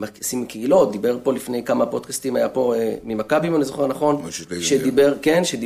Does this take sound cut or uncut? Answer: uncut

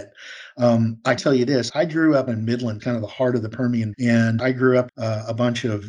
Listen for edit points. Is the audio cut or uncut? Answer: cut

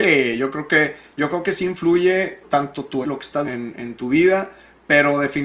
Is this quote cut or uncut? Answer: cut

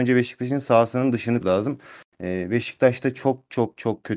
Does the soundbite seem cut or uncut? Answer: cut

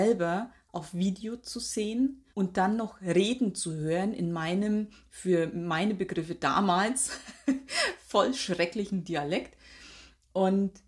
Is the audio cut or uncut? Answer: cut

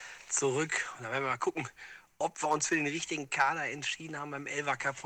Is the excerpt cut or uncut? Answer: uncut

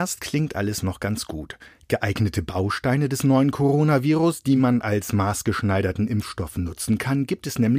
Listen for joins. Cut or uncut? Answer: uncut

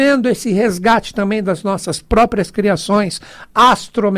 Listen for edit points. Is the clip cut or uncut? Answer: uncut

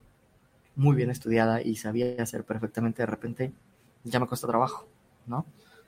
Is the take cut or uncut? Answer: uncut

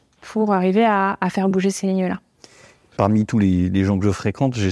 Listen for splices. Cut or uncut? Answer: uncut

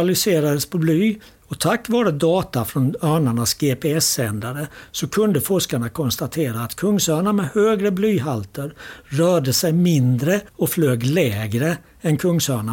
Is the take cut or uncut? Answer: cut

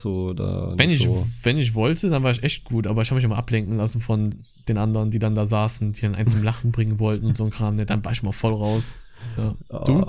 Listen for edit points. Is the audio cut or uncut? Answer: uncut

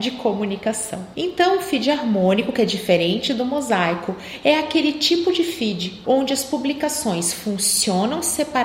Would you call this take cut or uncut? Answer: cut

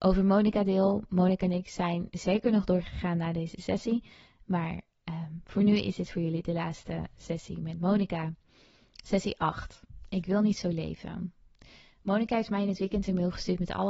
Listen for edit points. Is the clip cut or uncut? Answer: uncut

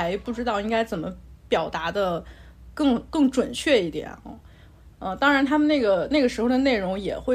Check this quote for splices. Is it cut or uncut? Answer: uncut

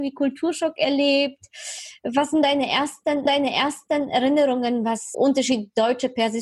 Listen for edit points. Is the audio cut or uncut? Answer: cut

